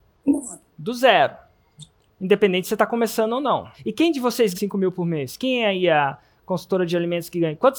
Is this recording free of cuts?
no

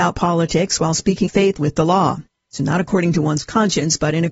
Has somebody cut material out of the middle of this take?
yes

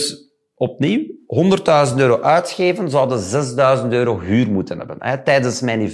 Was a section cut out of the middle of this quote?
no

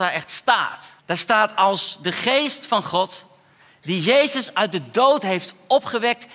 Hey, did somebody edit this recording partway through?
yes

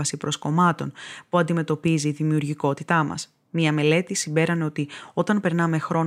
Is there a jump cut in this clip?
no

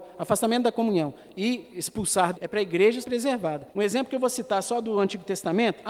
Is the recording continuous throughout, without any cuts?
no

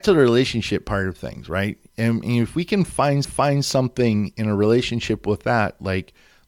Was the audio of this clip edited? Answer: yes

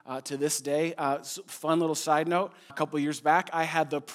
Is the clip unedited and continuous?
no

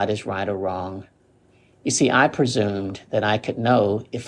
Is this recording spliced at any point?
no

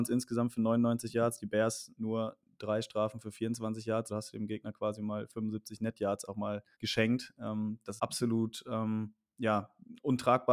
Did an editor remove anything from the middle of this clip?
yes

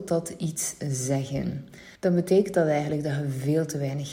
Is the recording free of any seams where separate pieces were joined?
no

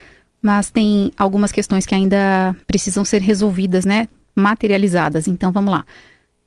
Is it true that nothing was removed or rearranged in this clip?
no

